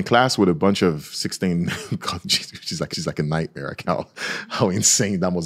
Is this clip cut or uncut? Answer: cut